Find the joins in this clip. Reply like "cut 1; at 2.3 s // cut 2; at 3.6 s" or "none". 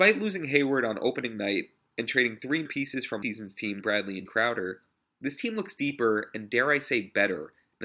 cut 1; at 2.7 s // cut 2; at 3.2 s // cut 3; at 3.8 s // cut 4; at 4.3 s